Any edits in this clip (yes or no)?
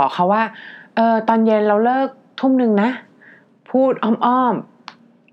no